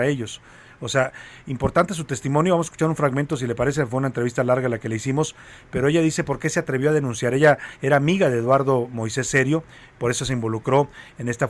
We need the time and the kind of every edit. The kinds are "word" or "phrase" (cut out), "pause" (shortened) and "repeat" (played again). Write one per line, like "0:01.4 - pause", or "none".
none